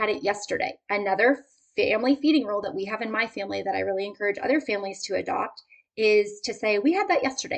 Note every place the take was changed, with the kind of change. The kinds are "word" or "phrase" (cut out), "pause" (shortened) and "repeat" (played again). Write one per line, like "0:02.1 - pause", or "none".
none